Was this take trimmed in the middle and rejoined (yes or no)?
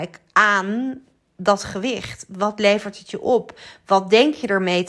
no